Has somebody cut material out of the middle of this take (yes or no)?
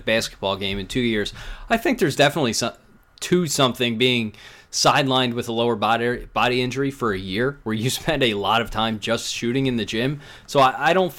no